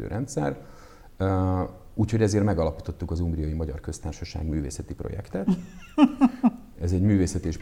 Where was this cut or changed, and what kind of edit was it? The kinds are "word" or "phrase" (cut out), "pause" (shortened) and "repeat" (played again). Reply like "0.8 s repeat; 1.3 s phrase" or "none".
none